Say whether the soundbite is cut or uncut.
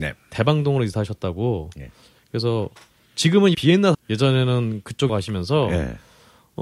cut